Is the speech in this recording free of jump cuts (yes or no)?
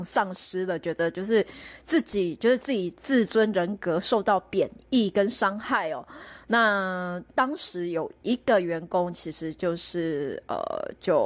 no